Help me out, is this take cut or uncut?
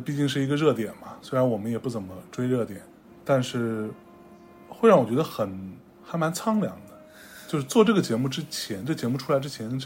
uncut